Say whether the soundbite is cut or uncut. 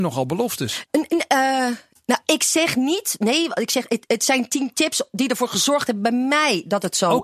uncut